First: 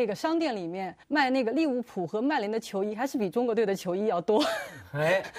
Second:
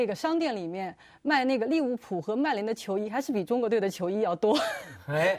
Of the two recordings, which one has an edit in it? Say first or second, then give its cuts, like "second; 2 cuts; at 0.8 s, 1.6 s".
first; 1 cut; at 1.0 s